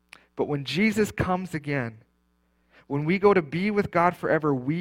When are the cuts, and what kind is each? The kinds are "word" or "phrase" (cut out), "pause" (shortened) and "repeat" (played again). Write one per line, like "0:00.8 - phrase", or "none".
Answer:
none